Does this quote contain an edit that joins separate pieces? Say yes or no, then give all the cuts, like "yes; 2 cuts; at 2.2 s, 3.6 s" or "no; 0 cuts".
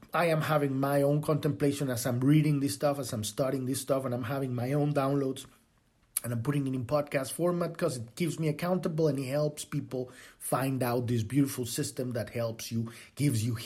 no; 0 cuts